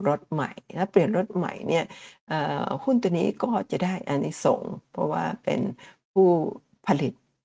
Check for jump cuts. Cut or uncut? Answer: uncut